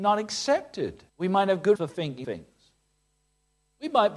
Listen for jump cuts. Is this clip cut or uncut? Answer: cut